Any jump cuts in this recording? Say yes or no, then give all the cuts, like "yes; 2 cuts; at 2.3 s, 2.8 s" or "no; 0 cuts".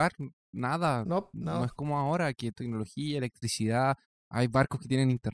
yes; 1 cut; at 2.5 s